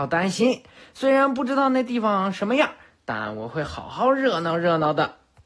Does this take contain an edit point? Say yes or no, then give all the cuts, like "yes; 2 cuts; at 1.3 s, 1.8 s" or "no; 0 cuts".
no; 0 cuts